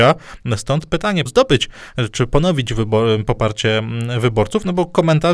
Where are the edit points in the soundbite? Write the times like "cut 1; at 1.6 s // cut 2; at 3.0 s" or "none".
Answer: cut 1; at 1.3 s